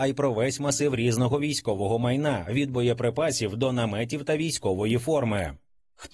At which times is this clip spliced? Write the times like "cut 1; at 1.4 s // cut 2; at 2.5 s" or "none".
none